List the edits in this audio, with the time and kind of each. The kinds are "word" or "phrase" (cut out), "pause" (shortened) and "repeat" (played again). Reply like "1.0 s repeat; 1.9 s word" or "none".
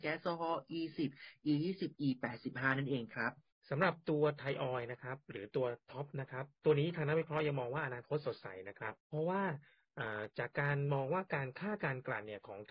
1.9 s phrase; 3.5 s pause; 5.8 s pause; 6.6 s pause; 9.0 s pause